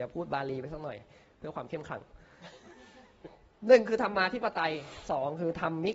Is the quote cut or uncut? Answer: uncut